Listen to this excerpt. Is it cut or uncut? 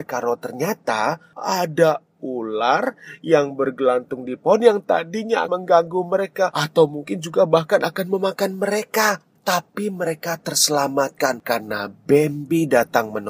cut